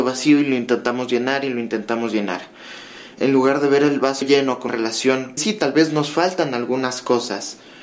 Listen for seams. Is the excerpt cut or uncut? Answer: cut